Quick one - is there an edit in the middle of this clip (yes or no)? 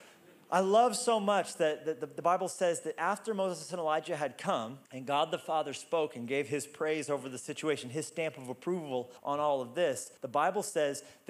yes